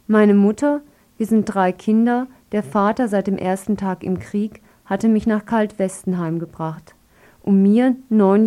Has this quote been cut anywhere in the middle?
no; 0 cuts

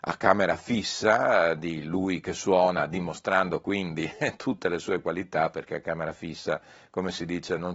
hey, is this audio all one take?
yes; 0 cuts

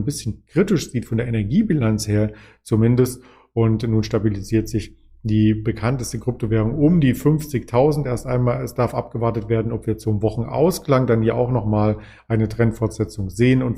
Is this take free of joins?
yes; 0 cuts

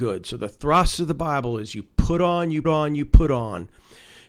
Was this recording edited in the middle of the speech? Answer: yes; 1 cut; at 2.6 s

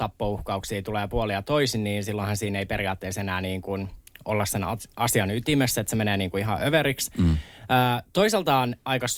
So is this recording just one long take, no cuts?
yes; 0 cuts

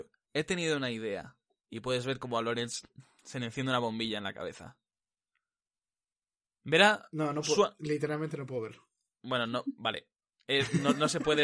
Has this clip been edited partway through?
no; 0 cuts

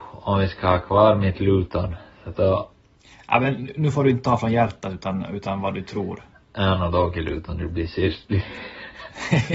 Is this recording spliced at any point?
no; 0 cuts

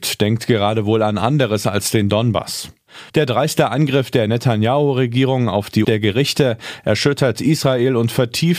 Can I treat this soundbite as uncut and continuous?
no; 1 cut; at 5.8 s

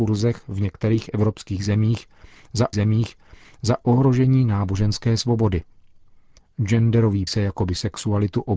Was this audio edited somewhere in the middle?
yes; 2 cuts; at 2.7 s, 7.3 s

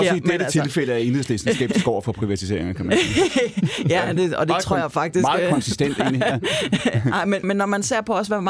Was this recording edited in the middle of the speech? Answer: yes; 1 cut; at 7.4 s

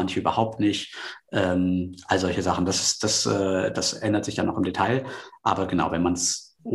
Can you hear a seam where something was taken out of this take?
no; 0 cuts

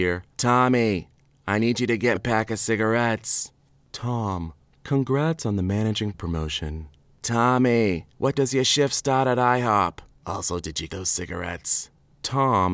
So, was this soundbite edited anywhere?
yes; 4 cuts; at 2.2 s, 6.1 s, 8.4 s, 10.9 s

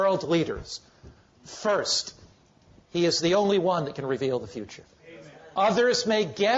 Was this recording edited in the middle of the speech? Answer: no; 0 cuts

